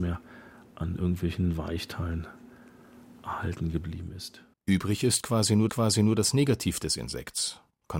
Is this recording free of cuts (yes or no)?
no